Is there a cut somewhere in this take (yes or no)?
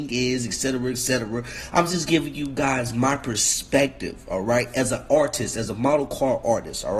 no